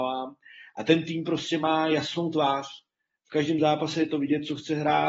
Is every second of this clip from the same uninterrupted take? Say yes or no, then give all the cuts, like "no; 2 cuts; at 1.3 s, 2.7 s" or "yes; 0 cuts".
yes; 0 cuts